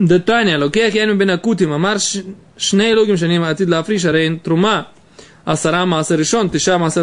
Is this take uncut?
yes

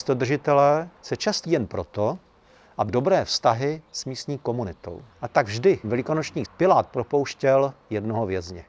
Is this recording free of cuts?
no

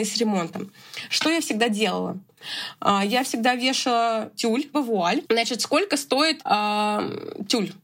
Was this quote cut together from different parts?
yes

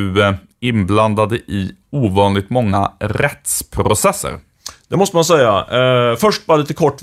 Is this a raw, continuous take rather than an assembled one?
yes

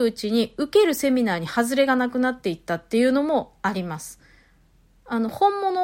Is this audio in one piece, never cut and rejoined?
yes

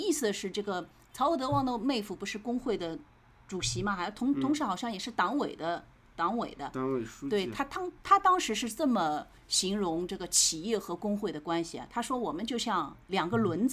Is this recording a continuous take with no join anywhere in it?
yes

